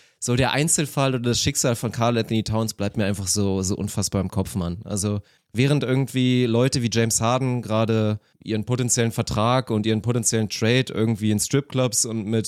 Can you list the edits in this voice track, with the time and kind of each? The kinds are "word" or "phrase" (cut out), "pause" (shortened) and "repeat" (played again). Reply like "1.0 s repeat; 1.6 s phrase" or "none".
none